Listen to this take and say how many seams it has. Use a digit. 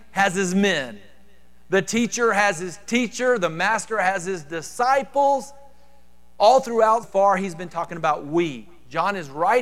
1